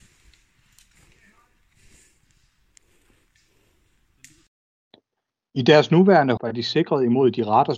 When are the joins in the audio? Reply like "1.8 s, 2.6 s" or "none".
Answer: 6.4 s